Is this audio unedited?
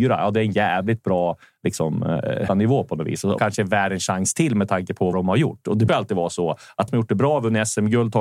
no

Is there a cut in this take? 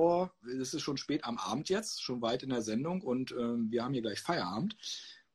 no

